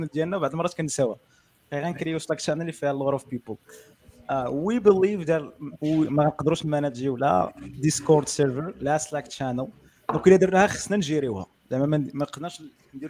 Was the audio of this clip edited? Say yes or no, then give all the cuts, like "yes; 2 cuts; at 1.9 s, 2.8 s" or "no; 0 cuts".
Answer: no; 0 cuts